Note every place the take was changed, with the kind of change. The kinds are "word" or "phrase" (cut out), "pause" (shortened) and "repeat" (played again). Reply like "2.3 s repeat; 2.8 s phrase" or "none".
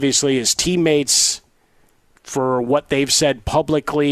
none